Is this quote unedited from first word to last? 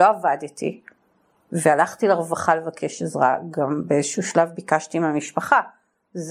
yes; 0 cuts

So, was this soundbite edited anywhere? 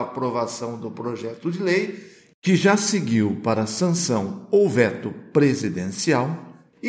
no; 0 cuts

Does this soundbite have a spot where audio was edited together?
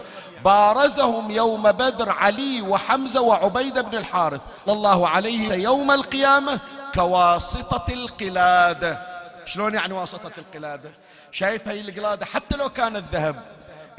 yes; 2 cuts; at 4.7 s, 5.5 s

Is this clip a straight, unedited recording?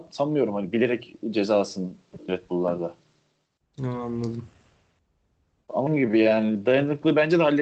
no; 2 cuts; at 2.3 s, 5.9 s

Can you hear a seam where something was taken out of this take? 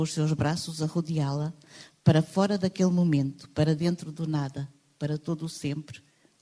no; 0 cuts

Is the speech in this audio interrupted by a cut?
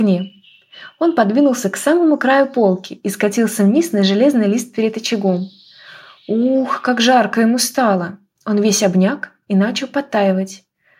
no; 0 cuts

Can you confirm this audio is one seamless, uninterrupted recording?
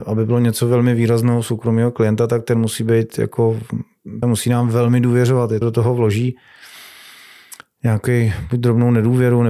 no; 2 cuts; at 4.2 s, 5.6 s

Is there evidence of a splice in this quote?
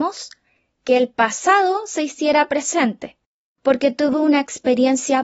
no; 0 cuts

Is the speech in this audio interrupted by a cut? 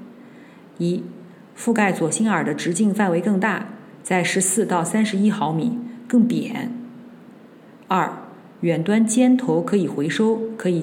no; 0 cuts

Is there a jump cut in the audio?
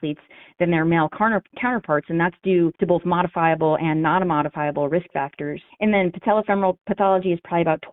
yes; 2 cuts; at 2.7 s, 5.7 s

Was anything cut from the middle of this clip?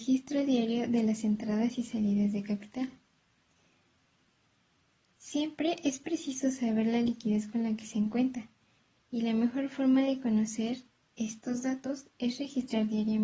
no; 0 cuts

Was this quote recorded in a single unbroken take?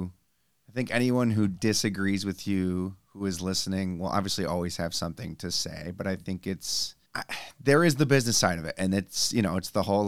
no; 1 cut; at 7.0 s

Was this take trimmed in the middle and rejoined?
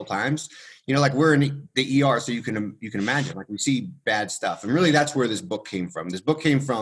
no; 0 cuts

